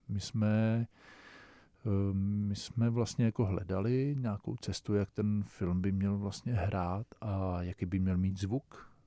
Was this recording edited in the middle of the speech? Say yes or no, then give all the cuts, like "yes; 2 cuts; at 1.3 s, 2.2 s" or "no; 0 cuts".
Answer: no; 0 cuts